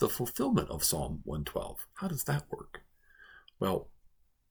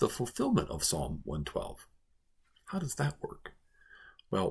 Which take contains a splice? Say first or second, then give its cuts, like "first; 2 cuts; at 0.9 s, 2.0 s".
first; 1 cut; at 1.9 s